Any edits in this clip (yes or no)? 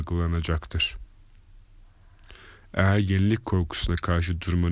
no